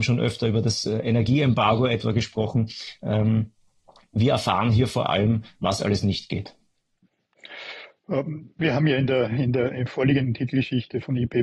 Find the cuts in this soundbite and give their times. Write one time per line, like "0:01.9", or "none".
none